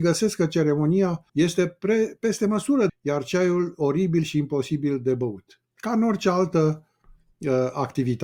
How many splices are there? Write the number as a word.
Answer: three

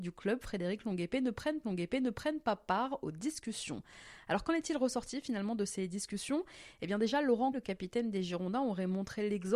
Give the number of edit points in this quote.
two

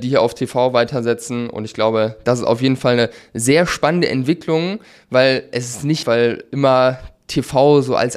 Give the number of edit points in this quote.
one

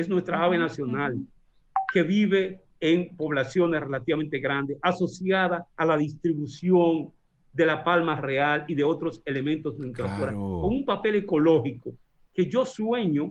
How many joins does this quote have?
two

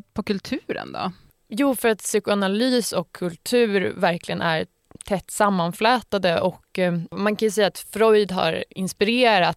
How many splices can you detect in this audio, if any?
zero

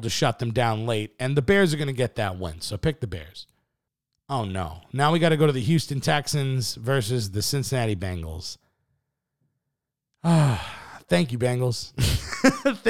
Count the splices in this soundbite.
one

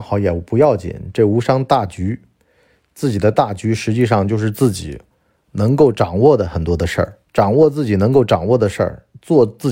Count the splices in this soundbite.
one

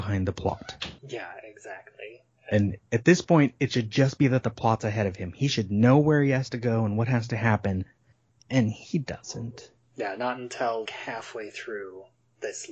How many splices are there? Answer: two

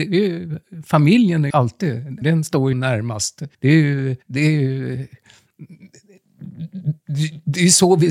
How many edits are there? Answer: five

